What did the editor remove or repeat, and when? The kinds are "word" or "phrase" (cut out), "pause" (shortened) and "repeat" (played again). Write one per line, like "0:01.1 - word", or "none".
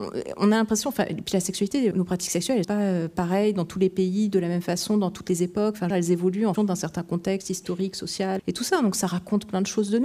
0:01.9 - word
0:02.6 - word
0:05.9 - phrase
0:06.6 - word
0:08.4 - word